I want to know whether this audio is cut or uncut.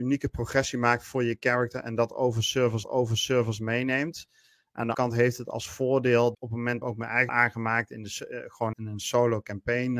cut